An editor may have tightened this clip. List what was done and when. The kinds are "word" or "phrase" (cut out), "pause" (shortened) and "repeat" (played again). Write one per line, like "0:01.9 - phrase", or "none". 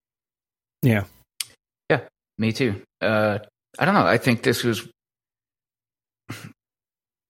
0:03.5 - pause